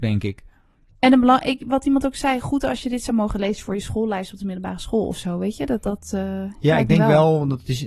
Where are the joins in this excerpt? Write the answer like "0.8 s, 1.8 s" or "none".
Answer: none